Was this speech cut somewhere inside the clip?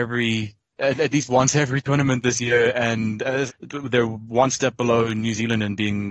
yes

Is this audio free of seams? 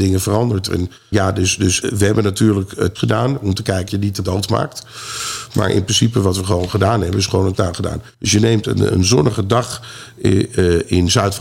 no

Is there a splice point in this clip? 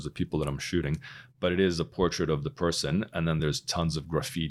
no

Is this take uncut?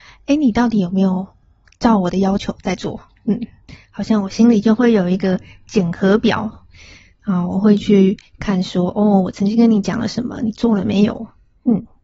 yes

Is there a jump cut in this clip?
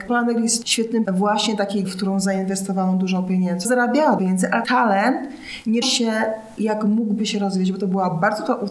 yes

